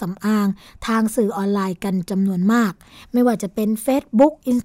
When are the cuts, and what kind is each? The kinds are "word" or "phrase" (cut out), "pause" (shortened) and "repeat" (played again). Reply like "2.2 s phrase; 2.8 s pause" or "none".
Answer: none

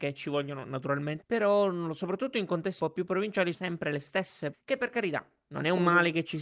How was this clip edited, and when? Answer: 1.2 s word; 2.8 s word; 3.5 s word; 4.5 s word

